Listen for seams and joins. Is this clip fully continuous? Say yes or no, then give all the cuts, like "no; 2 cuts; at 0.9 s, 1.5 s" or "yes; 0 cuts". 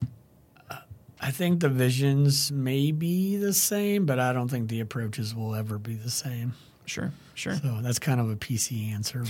yes; 0 cuts